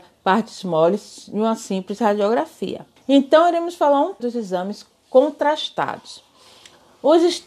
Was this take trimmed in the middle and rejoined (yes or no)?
yes